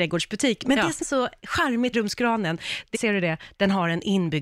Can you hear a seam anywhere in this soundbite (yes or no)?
yes